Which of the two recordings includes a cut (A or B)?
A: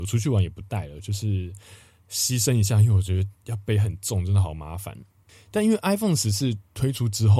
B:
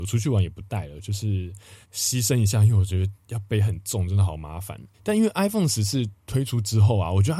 B